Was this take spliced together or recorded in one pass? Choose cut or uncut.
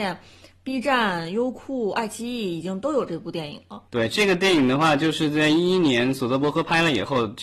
cut